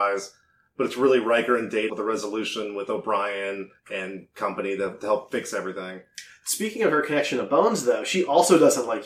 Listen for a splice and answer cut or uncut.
cut